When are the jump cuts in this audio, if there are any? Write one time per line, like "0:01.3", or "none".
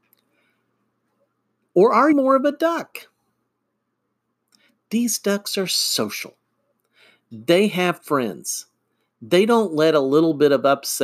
0:02.1